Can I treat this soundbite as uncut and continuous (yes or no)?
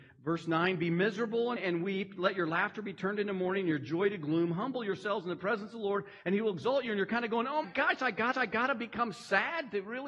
no